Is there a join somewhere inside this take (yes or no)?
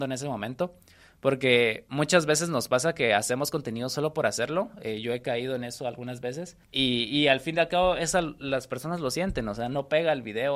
yes